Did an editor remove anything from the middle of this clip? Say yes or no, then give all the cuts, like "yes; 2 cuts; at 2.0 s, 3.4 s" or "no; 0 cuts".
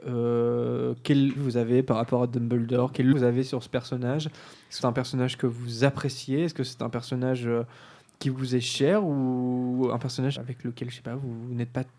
yes; 4 cuts; at 1.4 s, 3.1 s, 4.8 s, 10.4 s